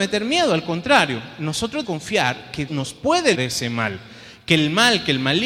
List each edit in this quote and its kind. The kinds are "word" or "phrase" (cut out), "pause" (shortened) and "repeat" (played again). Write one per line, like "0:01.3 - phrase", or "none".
0:01.8 - word
0:02.7 - word
0:03.3 - word